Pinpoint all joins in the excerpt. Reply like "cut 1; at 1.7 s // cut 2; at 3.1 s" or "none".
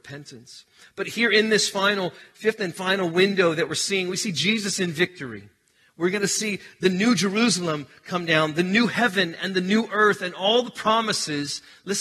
none